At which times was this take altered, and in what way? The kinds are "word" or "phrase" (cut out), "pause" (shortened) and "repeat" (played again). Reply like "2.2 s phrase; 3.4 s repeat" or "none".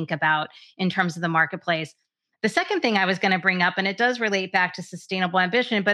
none